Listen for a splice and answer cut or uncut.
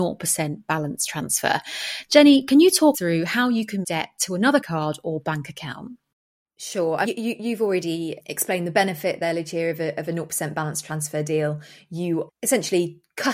cut